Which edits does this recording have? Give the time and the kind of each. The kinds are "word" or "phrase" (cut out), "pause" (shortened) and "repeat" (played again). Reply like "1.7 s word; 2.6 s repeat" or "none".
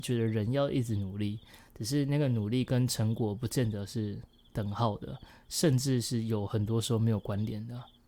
none